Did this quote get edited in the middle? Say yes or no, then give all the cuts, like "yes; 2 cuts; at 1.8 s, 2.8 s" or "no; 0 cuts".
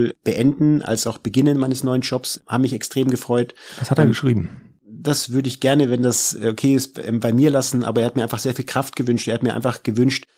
no; 0 cuts